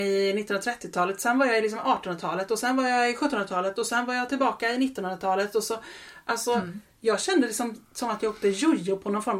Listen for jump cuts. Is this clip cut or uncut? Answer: uncut